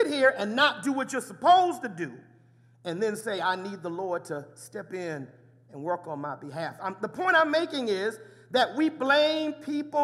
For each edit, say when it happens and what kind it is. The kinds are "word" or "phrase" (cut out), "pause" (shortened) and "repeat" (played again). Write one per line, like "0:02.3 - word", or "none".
none